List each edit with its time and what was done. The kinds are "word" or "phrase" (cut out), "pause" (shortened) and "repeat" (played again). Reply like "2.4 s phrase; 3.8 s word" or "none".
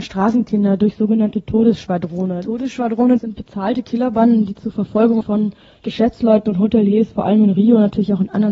3.2 s word; 5.2 s phrase